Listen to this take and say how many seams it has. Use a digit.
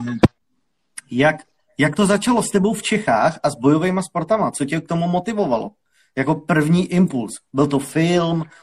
0